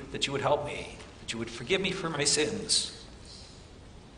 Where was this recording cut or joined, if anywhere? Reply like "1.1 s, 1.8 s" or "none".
none